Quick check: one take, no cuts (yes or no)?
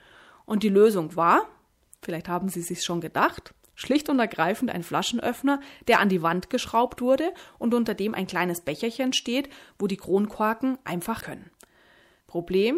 no